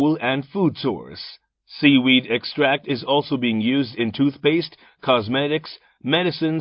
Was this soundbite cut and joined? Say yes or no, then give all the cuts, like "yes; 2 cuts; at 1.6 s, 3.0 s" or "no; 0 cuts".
no; 0 cuts